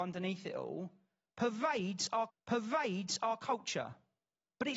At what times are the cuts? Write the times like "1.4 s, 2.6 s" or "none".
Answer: 2.3 s